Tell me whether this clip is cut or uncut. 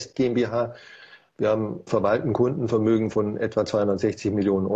cut